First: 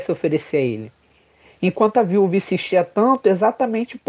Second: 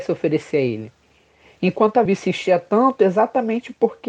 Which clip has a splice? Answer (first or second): second